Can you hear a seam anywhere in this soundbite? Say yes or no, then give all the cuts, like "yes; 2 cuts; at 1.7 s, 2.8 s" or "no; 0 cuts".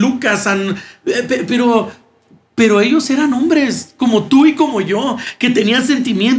no; 0 cuts